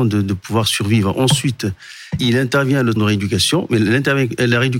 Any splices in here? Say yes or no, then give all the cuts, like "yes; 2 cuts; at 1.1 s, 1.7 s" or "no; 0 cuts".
yes; 2 cuts; at 2.2 s, 3.0 s